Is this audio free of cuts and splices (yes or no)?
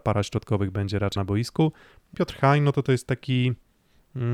no